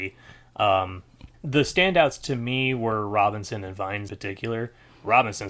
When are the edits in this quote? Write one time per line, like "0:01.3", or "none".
0:01.3
0:04.1